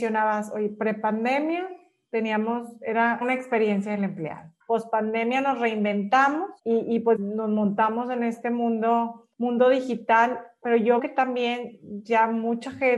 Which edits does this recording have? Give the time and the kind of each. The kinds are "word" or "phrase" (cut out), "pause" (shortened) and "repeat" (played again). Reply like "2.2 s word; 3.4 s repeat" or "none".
3.2 s word; 4.6 s pause; 6.6 s pause; 7.1 s word; 9.3 s pause; 10.6 s word; 11.0 s word